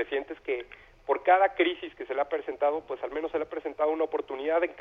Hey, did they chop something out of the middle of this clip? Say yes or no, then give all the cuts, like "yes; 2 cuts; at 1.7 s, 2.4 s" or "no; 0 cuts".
no; 0 cuts